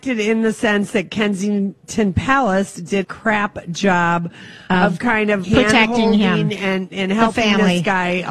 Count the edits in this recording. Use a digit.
2